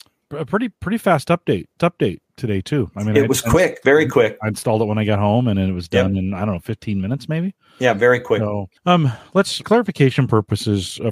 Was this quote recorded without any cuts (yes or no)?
no